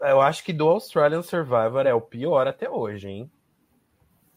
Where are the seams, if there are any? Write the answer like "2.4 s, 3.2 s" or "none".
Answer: none